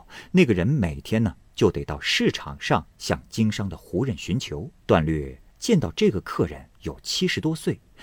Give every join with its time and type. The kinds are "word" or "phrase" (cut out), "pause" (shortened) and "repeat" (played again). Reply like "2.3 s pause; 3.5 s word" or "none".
2.9 s pause; 4.8 s pause; 5.5 s pause; 6.7 s pause